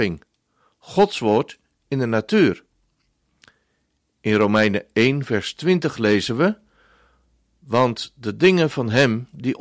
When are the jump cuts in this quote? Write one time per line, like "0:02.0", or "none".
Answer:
none

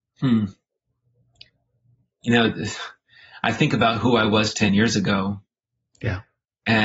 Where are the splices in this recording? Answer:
none

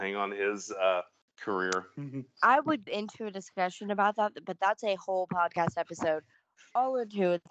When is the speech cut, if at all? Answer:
0:02.4
0:02.9

